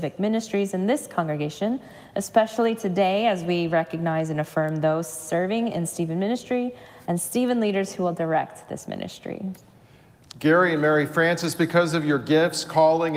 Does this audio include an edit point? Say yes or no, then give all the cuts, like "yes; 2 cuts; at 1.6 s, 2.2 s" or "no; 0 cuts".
no; 0 cuts